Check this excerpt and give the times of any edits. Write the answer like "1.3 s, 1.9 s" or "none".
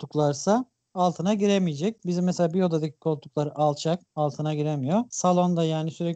none